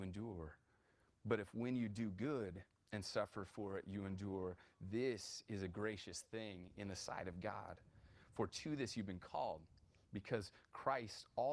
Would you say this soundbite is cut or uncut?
uncut